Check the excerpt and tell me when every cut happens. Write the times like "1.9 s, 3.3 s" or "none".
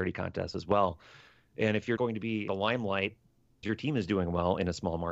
2.0 s, 2.5 s, 3.6 s